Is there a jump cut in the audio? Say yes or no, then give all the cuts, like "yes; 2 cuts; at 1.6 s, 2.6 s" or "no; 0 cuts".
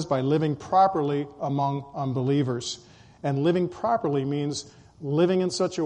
no; 0 cuts